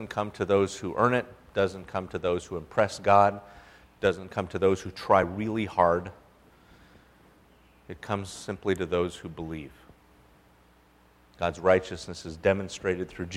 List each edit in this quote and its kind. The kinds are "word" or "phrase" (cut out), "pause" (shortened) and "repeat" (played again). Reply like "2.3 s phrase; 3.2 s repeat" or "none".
none